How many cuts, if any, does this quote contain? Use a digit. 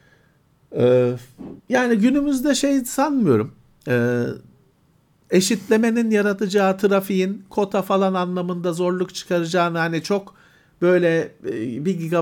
1